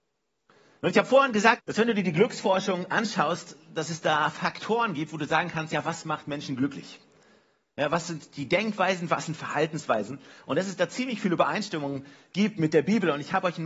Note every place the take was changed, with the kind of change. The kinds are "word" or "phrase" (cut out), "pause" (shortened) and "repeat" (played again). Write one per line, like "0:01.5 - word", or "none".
0:01.6 - word